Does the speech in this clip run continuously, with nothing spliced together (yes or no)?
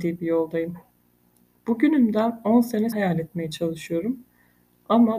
no